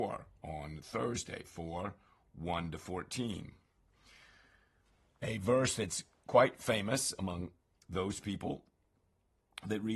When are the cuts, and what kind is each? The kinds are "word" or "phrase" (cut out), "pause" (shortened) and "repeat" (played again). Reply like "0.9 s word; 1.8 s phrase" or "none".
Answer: none